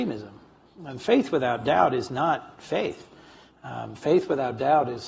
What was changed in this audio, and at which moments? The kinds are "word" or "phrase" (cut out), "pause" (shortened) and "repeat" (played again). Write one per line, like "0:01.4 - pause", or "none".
none